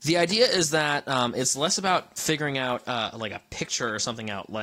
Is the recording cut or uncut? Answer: uncut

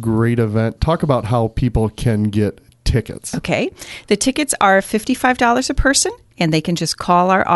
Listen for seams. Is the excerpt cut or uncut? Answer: uncut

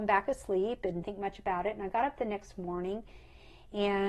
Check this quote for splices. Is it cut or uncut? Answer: cut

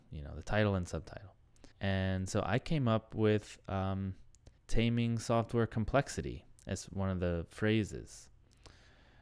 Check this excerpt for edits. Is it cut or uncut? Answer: cut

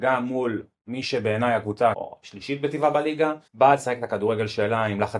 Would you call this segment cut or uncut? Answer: cut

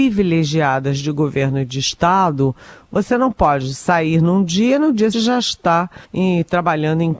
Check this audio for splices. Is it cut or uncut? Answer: cut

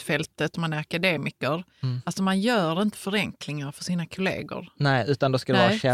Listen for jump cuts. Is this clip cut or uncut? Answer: uncut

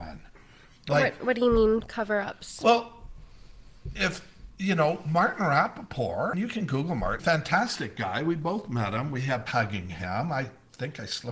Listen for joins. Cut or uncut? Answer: cut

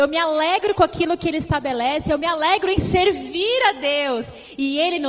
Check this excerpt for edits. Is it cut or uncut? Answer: uncut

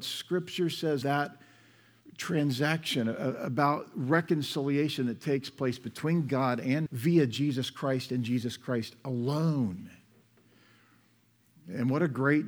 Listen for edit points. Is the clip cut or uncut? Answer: cut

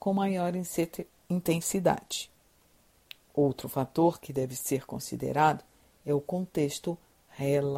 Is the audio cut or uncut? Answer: uncut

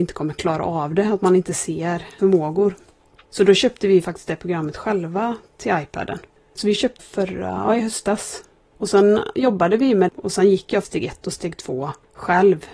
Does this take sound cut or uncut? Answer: cut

